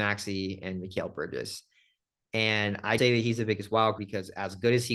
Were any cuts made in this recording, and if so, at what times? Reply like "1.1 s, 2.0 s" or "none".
3.0 s, 4.0 s